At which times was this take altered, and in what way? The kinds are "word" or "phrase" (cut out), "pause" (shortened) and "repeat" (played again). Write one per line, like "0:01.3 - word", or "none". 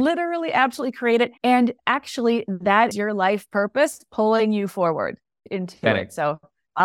0:01.4 - pause
0:02.9 - word